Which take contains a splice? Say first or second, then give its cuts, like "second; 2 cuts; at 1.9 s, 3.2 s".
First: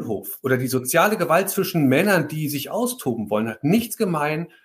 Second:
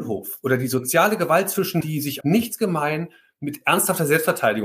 second; 2 cuts; at 1.8 s, 2.2 s